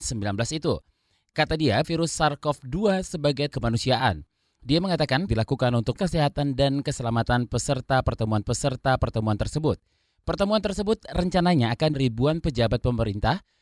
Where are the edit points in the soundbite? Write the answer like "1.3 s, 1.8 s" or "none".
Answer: 1.8 s, 3.5 s, 5.3 s, 6.0 s, 8.4 s, 11.9 s